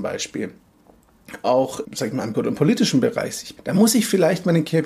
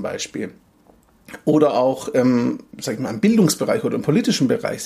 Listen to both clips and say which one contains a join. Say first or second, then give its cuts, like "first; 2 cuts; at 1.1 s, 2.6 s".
first; 4 cuts; at 1.4 s, 1.8 s, 2.3 s, 3.6 s